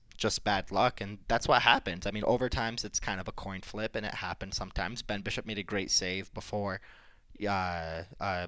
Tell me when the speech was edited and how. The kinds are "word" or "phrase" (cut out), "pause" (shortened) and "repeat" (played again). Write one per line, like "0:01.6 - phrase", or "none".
none